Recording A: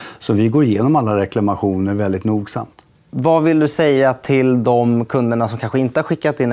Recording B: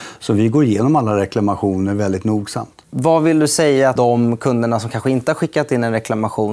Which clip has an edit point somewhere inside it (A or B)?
B